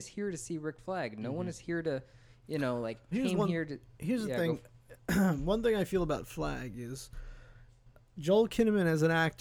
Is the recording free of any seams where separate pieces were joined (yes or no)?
no